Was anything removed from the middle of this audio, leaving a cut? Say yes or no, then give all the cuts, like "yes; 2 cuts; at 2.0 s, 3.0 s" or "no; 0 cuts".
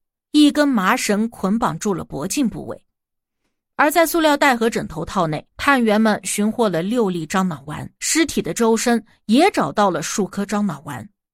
yes; 2 cuts; at 5.5 s, 8.0 s